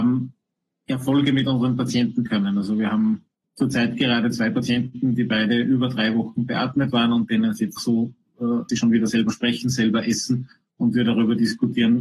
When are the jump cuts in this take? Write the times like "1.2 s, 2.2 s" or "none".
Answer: 2.3 s, 7.8 s, 8.7 s

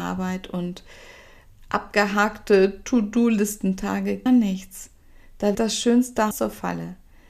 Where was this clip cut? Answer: 4.3 s, 5.5 s, 6.3 s

